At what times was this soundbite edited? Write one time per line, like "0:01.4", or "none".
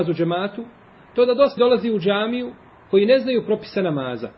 0:01.6